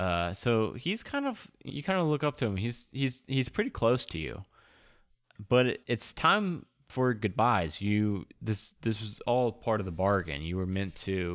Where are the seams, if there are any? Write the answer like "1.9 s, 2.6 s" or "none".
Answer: 1.7 s